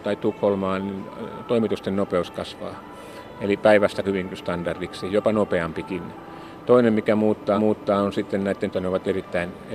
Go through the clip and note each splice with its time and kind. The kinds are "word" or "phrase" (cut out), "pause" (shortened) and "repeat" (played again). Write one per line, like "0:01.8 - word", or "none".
0:04.0 - phrase
0:07.6 - repeat
0:08.7 - phrase